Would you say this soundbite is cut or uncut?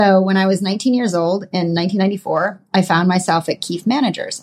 uncut